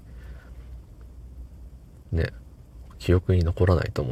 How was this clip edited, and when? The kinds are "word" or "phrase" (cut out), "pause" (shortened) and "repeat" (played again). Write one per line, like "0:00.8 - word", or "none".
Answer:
none